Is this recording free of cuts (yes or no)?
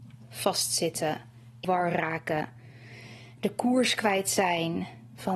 no